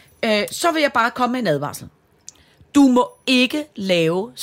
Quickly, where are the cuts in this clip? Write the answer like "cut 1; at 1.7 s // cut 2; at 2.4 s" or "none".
none

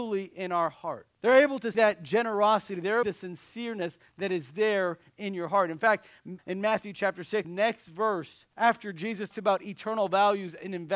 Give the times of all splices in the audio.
cut 1; at 1.1 s // cut 2; at 1.7 s // cut 3; at 3.0 s // cut 4; at 6.4 s // cut 5; at 7.4 s // cut 6; at 8.5 s // cut 7; at 9.3 s

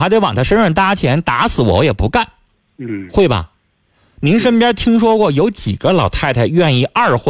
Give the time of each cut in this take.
cut 1; at 2.5 s

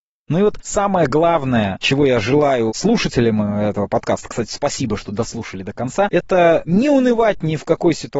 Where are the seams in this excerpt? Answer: none

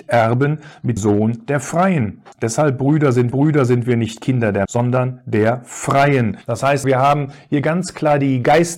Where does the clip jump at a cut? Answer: cut 1; at 1.0 s // cut 2; at 2.3 s // cut 3; at 3.3 s // cut 4; at 4.7 s // cut 5; at 6.4 s // cut 6; at 6.8 s

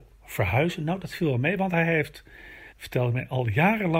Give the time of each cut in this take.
cut 1; at 2.7 s

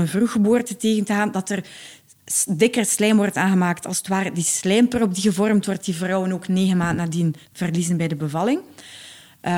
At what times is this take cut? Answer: cut 1; at 7.5 s

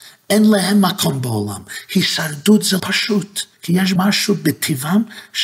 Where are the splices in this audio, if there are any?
cut 1; at 2.8 s // cut 2; at 3.5 s // cut 3; at 4.0 s

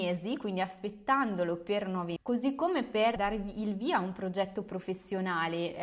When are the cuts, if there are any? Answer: cut 1; at 2.2 s // cut 2; at 3.2 s

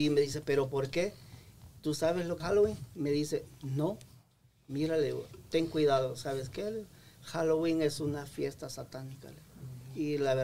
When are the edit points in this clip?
cut 1; at 2.4 s

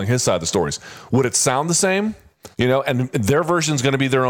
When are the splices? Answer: cut 1; at 2.5 s

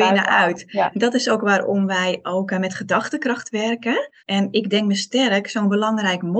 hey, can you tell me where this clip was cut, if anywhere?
cut 1; at 4.2 s

